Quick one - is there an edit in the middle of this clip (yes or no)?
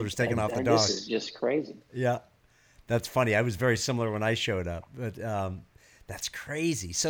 no